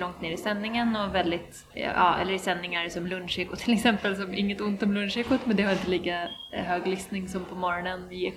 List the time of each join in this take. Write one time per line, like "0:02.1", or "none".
0:01.7